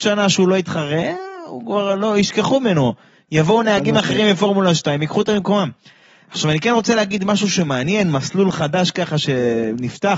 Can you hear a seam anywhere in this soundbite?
no; 0 cuts

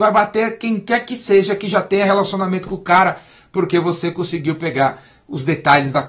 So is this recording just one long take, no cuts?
yes; 0 cuts

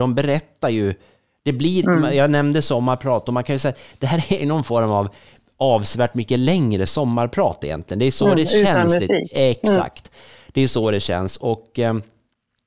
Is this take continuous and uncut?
yes; 0 cuts

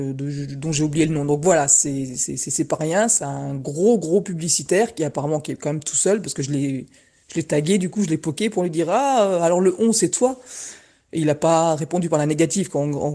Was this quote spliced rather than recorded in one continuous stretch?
no; 0 cuts

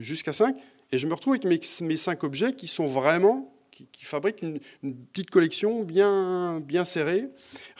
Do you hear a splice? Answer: no; 0 cuts

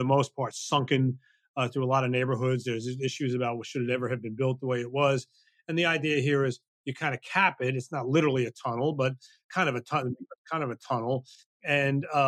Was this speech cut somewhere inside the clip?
no; 0 cuts

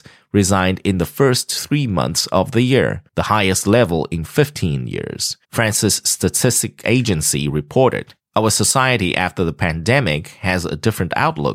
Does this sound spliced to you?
yes; 3 cuts; at 3.1 s, 5.4 s, 8.2 s

